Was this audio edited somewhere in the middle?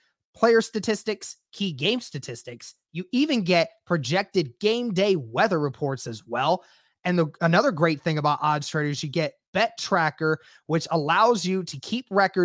no; 0 cuts

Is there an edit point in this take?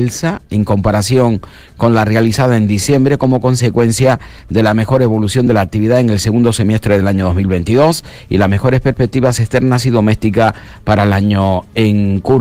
no; 0 cuts

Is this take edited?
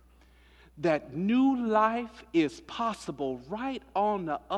no; 0 cuts

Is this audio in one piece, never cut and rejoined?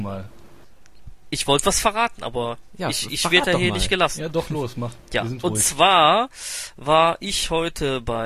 yes; 0 cuts

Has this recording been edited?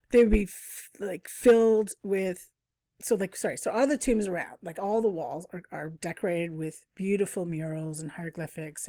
no; 0 cuts

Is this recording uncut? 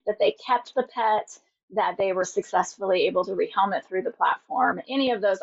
yes; 0 cuts

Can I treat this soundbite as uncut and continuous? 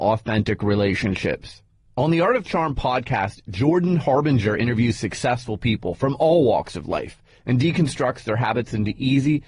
yes; 0 cuts

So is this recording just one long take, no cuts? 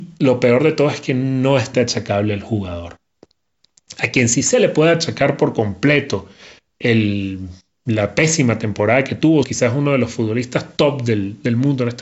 no; 2 cuts; at 1.7 s, 9.4 s

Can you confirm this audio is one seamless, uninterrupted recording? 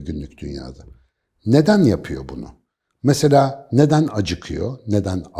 yes; 0 cuts

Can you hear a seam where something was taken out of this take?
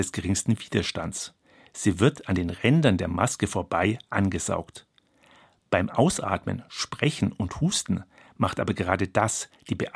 no; 0 cuts

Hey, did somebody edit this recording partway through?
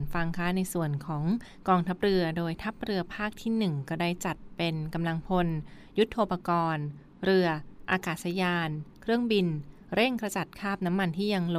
no; 0 cuts

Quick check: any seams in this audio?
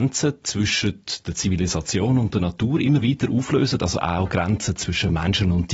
no; 0 cuts

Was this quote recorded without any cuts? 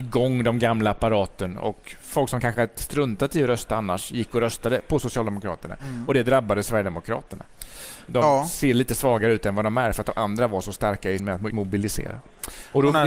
no; 2 cuts; at 11.2 s, 11.5 s

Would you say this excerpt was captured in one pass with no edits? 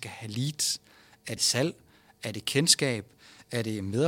no; 1 cut; at 1.4 s

